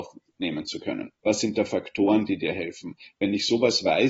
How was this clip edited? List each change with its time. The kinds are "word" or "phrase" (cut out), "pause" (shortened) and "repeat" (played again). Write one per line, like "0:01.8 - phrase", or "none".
0:01.2 - pause